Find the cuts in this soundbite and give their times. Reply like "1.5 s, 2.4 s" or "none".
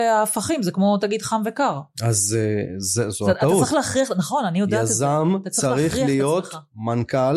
none